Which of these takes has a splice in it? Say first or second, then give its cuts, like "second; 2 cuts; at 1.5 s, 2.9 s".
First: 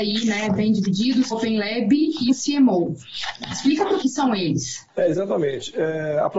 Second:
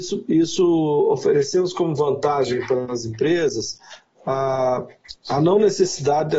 first; 3 cuts; at 1.3 s, 2.3 s, 4.0 s